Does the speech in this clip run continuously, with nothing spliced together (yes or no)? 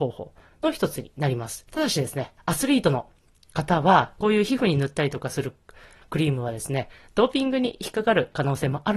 no